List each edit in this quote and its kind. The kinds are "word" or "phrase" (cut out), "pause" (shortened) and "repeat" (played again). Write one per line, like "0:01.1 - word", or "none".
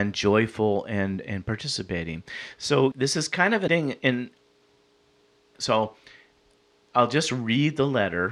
0:01.2 - word
0:02.9 - word
0:03.7 - word
0:05.5 - phrase